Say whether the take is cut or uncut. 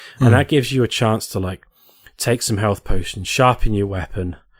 uncut